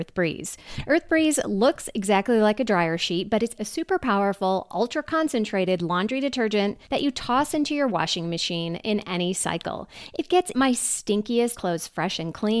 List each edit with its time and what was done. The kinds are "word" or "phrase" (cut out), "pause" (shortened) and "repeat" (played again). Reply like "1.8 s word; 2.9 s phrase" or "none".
3.6 s word; 6.8 s pause; 10.5 s word; 11.6 s word